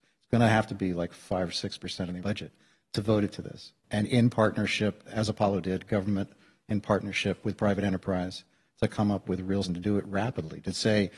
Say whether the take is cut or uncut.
cut